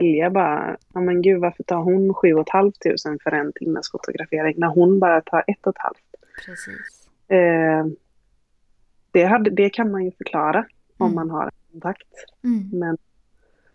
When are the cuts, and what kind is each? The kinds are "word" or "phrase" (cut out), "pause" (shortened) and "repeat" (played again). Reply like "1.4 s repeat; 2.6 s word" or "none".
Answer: none